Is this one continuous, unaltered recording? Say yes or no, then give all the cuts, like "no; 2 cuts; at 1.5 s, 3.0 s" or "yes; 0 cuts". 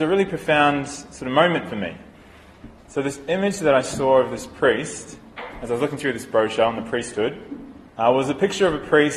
no; 1 cut; at 7.9 s